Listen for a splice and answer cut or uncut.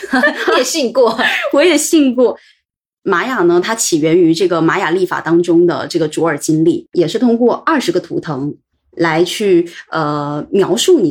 uncut